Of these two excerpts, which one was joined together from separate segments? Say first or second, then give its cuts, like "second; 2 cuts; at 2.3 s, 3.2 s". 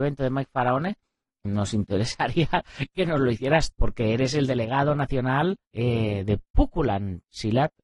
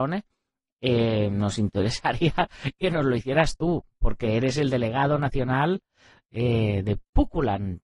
first; 3 cuts; at 1.4 s, 3.7 s, 5.6 s